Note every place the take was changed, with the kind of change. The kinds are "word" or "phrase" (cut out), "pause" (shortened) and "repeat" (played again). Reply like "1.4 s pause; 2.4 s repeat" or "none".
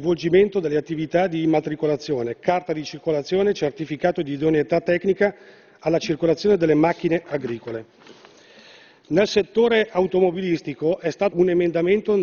11.3 s word